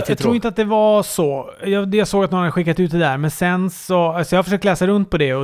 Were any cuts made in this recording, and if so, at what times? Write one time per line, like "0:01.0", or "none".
none